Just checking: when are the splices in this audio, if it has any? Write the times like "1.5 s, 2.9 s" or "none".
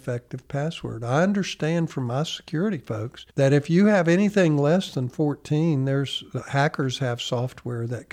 3.3 s